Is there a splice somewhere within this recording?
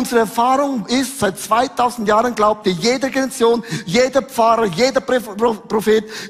no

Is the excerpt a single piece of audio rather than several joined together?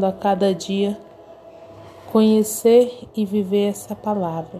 yes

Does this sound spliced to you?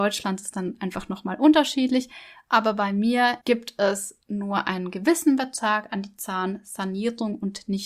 yes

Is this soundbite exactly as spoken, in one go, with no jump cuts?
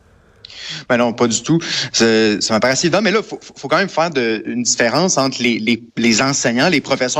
no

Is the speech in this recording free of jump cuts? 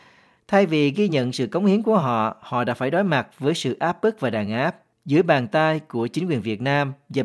yes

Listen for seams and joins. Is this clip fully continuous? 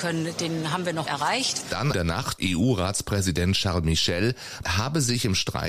no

